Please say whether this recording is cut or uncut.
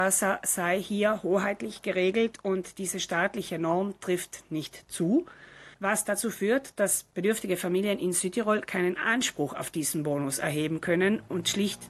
cut